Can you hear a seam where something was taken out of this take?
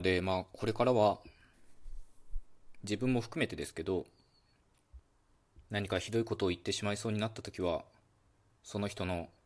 no; 0 cuts

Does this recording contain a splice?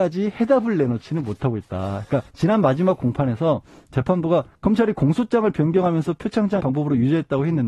yes; 3 cuts; at 2.3 s, 4.5 s, 6.6 s

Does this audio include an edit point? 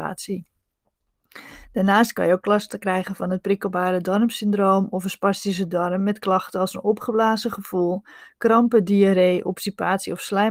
no; 0 cuts

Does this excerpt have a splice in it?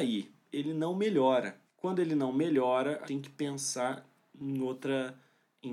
yes; 2 cuts; at 1.7 s, 3.0 s

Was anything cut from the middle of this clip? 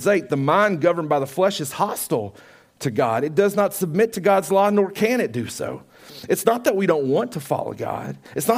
no; 0 cuts

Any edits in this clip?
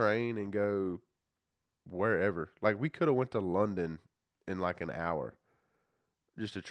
no; 0 cuts

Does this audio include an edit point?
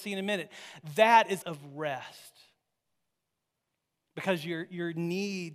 yes; 1 cut; at 1.4 s

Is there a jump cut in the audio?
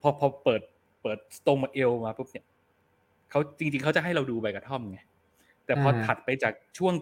no; 0 cuts

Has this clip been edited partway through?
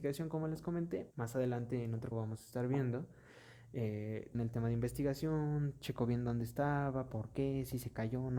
yes; 3 cuts; at 1.1 s, 2.1 s, 4.3 s

